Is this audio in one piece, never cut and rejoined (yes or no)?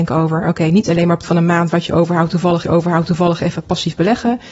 no